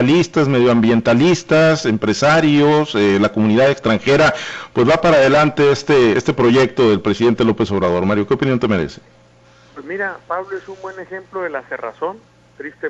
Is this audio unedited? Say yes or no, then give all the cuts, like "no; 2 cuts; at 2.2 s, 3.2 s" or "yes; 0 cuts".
yes; 0 cuts